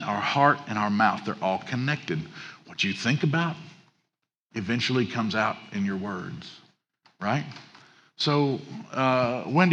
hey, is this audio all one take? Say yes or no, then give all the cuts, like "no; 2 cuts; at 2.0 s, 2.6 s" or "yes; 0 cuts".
yes; 0 cuts